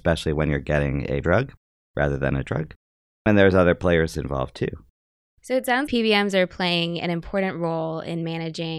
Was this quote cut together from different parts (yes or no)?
yes